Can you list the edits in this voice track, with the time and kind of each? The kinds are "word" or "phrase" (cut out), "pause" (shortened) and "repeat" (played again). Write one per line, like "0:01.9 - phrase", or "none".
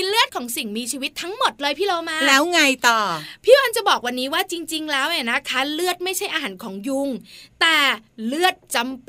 none